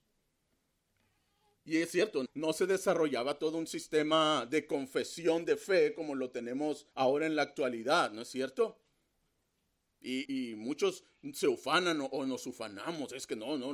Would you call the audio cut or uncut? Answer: cut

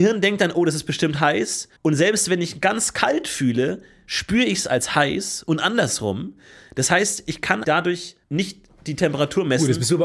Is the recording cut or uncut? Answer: cut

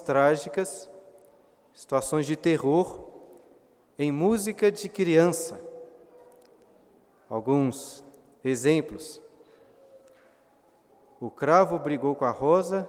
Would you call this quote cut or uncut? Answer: uncut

